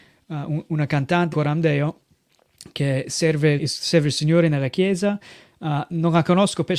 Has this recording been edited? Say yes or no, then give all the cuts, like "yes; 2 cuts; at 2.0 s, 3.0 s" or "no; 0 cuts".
yes; 2 cuts; at 1.3 s, 3.6 s